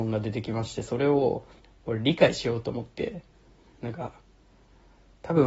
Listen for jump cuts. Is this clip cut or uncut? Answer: cut